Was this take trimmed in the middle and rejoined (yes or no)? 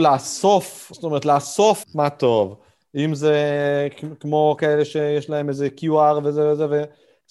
yes